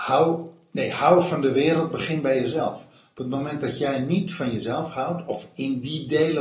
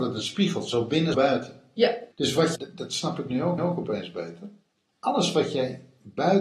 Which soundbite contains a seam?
second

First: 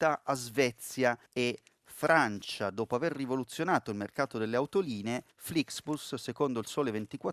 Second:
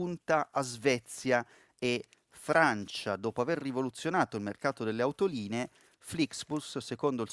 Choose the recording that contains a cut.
first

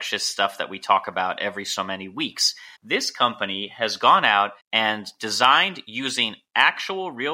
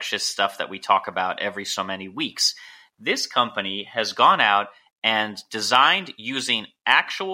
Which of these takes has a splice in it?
first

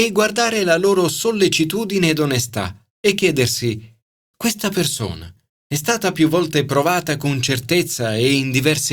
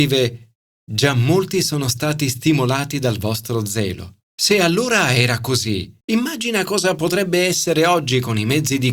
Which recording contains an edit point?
second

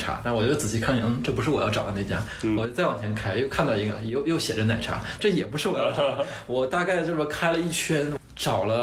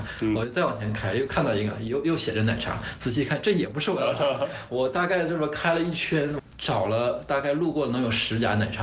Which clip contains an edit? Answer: first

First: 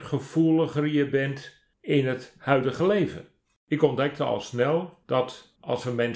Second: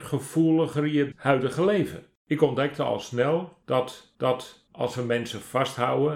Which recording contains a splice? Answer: second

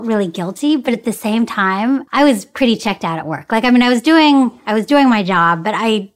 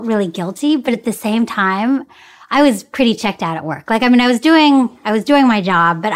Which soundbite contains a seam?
first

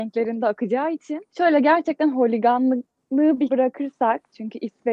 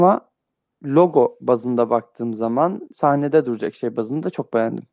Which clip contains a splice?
first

